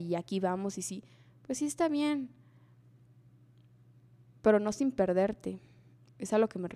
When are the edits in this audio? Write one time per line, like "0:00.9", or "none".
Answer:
none

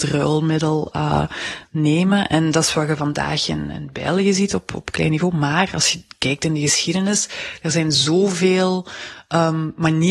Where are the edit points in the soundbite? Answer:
none

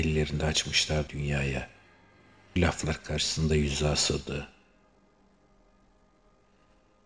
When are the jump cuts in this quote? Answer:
0:01.1
0:02.6

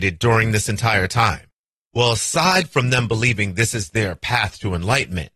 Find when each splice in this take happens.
none

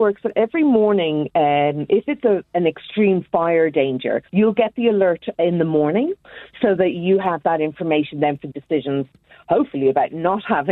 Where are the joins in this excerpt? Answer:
0:04.3
0:08.5

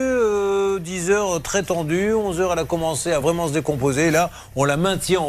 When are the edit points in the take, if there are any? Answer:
none

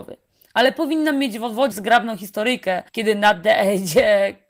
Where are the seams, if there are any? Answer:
0:01.7
0:02.9

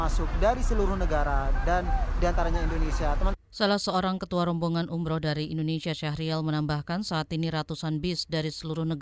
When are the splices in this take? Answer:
none

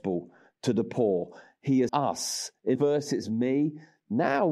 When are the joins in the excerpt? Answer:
0:01.9
0:02.7
0:03.2

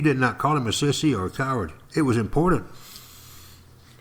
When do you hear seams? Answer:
0:01.8

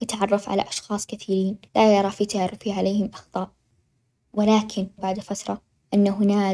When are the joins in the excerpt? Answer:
0:01.7
0:03.1
0:05.0

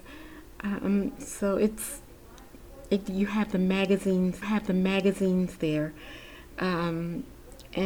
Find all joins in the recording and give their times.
0:04.4

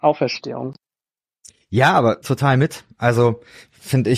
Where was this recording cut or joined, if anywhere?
0:02.2

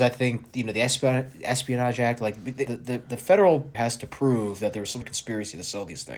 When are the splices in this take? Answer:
0:02.7
0:03.7
0:05.0

